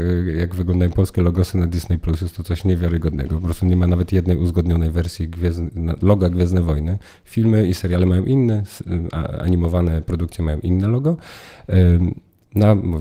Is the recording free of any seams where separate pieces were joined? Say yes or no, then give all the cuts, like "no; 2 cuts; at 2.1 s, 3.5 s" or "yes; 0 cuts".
yes; 0 cuts